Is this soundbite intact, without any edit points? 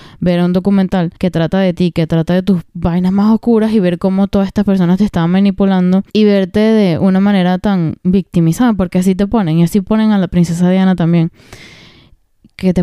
no; 3 cuts; at 1.2 s, 2.7 s, 6.1 s

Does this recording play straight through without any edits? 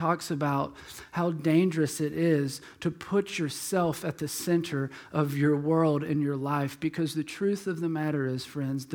yes; 0 cuts

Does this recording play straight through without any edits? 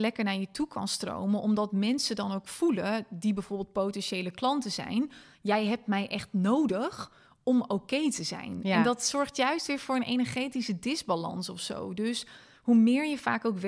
yes; 0 cuts

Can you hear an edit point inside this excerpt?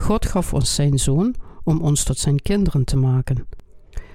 no; 0 cuts

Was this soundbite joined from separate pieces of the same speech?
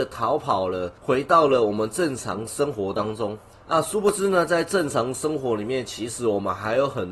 yes; 2 cuts; at 1.0 s, 3.5 s

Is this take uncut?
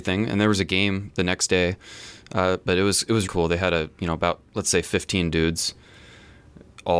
no; 2 cuts; at 3.3 s, 4.5 s

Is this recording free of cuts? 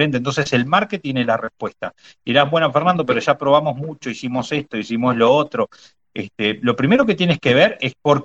yes; 0 cuts

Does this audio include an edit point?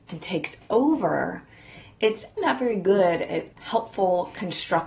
yes; 2 cuts; at 2.4 s, 3.5 s

